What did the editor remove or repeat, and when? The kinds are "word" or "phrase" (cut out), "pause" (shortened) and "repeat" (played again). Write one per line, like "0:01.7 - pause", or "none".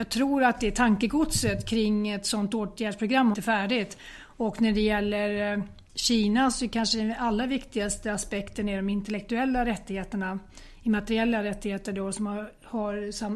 0:03.3 - phrase